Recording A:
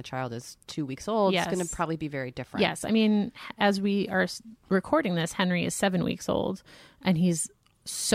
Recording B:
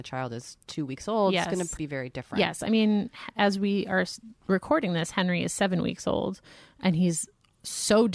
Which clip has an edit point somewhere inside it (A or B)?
B